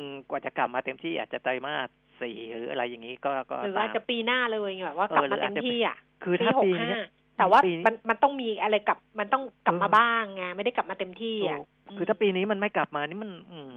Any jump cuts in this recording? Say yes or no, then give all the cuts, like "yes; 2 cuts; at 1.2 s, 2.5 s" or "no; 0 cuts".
no; 0 cuts